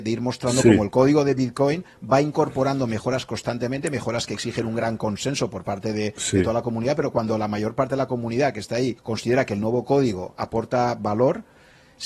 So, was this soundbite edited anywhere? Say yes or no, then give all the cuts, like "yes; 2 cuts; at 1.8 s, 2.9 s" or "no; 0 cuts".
yes; 1 cut; at 9.0 s